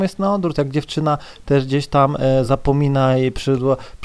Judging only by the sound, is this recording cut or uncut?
uncut